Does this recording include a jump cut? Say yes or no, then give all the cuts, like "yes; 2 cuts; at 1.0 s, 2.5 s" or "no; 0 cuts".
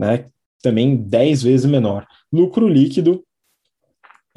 no; 0 cuts